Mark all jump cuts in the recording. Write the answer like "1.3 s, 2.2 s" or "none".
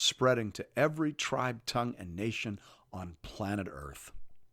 none